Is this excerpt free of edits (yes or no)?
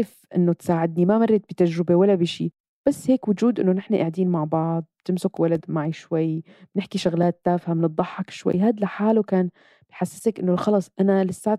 yes